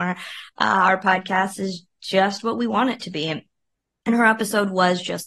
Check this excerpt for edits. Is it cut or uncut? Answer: uncut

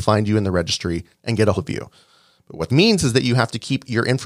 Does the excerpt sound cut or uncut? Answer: cut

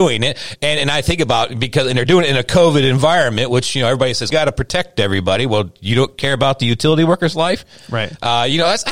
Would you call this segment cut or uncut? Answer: cut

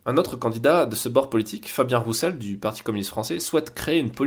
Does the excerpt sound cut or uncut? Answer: uncut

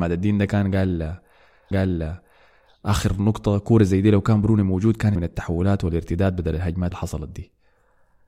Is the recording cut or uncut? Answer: cut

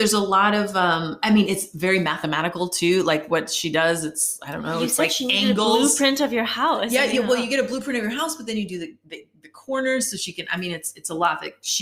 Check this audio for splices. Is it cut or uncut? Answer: uncut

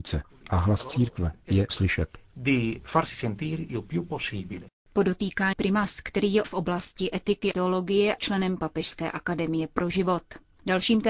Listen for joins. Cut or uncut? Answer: cut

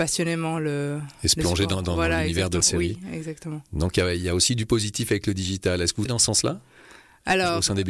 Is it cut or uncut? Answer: cut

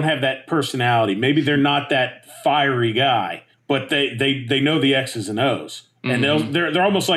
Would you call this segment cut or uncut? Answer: cut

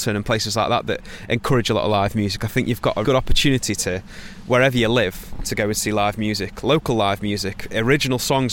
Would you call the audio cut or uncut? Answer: cut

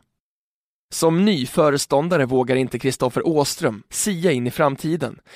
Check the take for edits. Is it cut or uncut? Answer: uncut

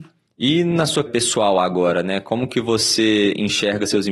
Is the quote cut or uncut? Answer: cut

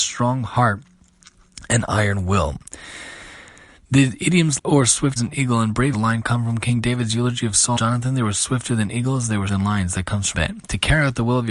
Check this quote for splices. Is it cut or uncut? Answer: cut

